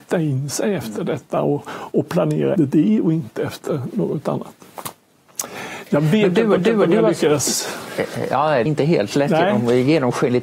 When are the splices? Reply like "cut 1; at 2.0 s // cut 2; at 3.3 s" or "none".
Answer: cut 1; at 2.6 s // cut 2; at 6.6 s // cut 3; at 8.7 s